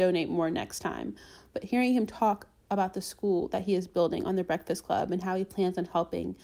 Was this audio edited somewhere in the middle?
no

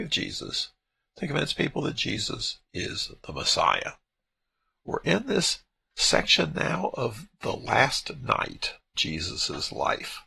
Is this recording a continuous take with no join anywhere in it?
no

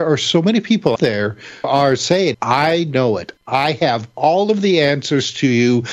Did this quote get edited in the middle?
yes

